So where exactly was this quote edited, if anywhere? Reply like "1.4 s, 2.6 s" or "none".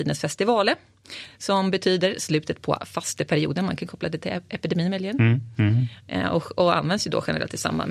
none